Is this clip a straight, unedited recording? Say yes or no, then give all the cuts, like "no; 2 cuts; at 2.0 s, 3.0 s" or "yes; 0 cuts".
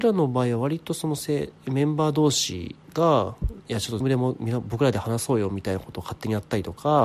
no; 2 cuts; at 1.6 s, 4.0 s